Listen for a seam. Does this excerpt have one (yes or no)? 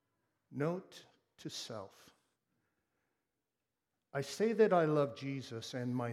no